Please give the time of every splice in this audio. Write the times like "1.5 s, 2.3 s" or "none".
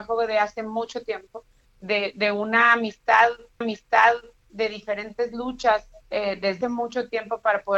1.6 s, 3.6 s, 6.0 s, 6.6 s